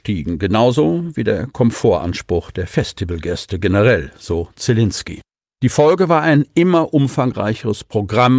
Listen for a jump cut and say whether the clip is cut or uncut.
uncut